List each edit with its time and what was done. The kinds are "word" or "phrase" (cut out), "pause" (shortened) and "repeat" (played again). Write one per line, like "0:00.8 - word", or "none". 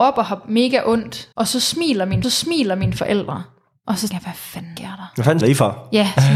0:01.3 - pause
0:02.2 - repeat
0:04.1 - word
0:04.8 - word
0:05.4 - word